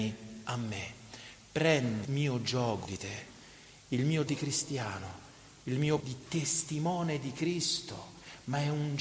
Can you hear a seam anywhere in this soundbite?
yes; 4 cuts; at 2.0 s, 2.8 s, 4.3 s, 6.0 s

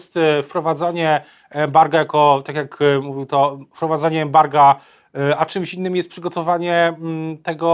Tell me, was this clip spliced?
no; 0 cuts

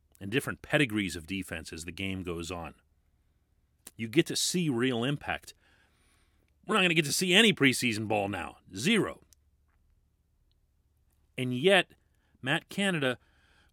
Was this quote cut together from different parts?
no; 0 cuts

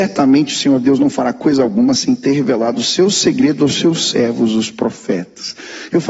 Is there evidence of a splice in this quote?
no; 0 cuts

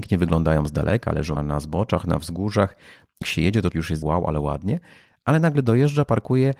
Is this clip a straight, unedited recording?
no; 4 cuts; at 1.4 s, 3.2 s, 3.7 s, 4.0 s

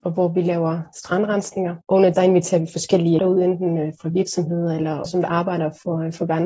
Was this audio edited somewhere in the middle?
yes; 4 cuts; at 1.8 s, 2.1 s, 3.2 s, 5.1 s

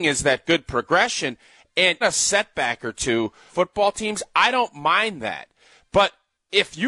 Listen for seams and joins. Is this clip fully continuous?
no; 2 cuts; at 2.0 s, 3.5 s

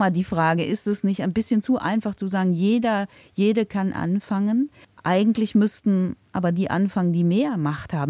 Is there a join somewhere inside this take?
no; 0 cuts

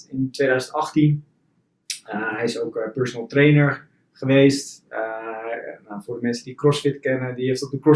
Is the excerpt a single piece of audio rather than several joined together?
yes; 0 cuts

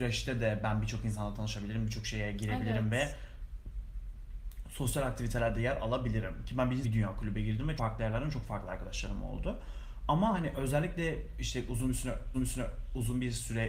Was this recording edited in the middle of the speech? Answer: yes; 3 cuts; at 6.8 s, 7.8 s, 12.3 s

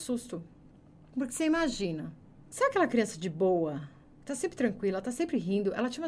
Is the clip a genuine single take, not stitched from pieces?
yes; 0 cuts

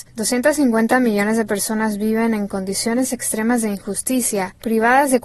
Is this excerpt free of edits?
yes; 0 cuts

